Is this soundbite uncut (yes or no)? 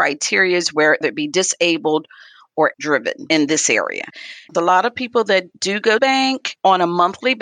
no